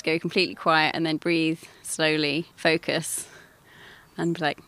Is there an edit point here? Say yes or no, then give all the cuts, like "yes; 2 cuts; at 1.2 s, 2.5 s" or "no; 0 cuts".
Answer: yes; 2 cuts; at 1.2 s, 2.5 s